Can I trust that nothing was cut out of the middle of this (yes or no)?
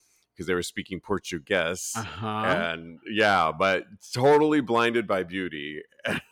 yes